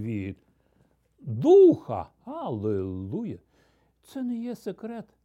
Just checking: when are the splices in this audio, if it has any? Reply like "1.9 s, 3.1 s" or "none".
none